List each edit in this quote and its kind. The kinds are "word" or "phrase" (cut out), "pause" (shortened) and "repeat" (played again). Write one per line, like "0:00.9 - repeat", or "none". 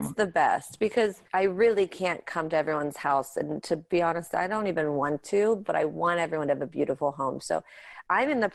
0:01.3 - pause